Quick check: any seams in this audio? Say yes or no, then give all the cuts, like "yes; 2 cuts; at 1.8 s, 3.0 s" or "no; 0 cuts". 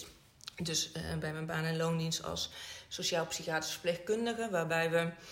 no; 0 cuts